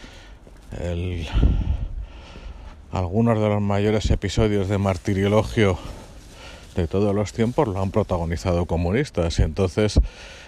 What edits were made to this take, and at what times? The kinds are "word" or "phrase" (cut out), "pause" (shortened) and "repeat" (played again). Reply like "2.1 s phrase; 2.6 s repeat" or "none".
none